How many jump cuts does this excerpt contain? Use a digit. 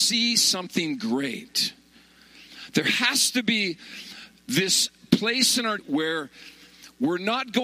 1